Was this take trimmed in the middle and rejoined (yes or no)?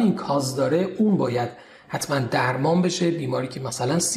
no